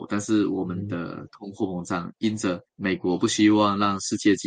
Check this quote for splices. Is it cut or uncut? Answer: cut